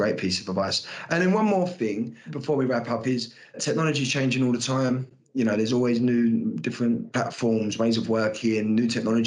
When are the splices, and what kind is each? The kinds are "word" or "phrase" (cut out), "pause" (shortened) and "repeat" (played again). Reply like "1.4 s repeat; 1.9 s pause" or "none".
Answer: none